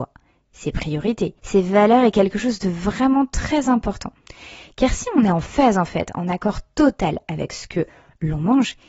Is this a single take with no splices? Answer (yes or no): no